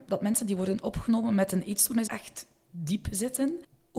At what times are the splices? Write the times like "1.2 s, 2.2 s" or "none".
2.1 s